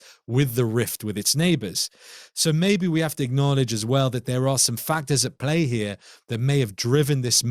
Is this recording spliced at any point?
no; 0 cuts

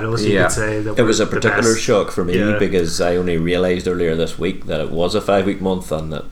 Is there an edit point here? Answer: no; 0 cuts

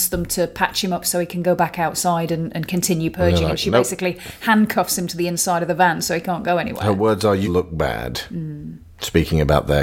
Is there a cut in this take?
yes; 1 cut; at 7.4 s

